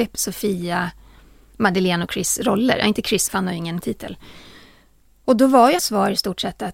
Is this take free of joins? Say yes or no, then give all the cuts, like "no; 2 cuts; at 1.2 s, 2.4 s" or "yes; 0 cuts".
no; 3 cuts; at 3.3 s, 3.8 s, 5.8 s